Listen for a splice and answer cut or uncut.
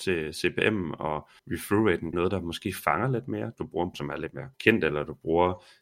cut